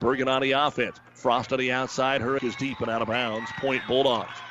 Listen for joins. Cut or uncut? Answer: cut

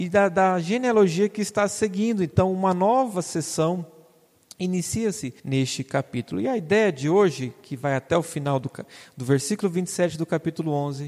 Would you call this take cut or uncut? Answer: cut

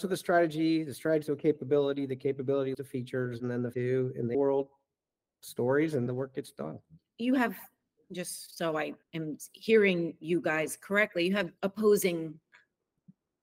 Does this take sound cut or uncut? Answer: cut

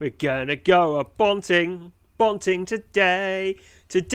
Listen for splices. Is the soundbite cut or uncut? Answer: uncut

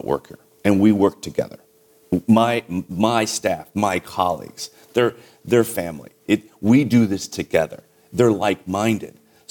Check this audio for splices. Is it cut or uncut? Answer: uncut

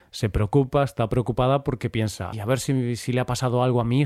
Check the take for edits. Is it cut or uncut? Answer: cut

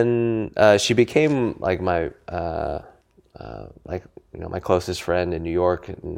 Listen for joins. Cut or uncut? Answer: uncut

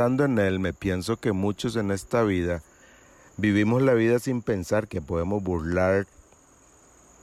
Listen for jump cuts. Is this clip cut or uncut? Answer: uncut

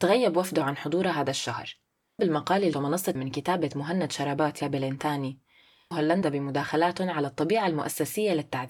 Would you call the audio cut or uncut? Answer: cut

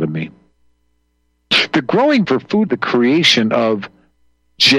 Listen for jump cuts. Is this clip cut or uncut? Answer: cut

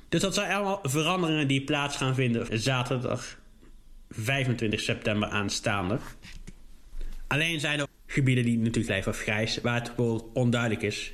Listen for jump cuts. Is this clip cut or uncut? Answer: cut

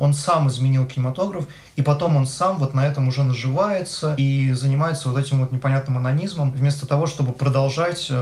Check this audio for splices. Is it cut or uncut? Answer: uncut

